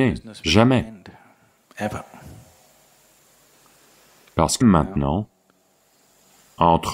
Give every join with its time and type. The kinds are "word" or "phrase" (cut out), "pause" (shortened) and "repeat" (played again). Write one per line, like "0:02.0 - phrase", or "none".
0:04.6 - word